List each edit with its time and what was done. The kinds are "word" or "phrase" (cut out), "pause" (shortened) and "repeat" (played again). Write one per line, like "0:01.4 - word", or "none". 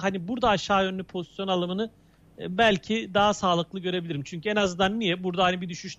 none